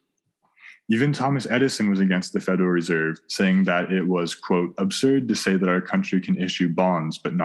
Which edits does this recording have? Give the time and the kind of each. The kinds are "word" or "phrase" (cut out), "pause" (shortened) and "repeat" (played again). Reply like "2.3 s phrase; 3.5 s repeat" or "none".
none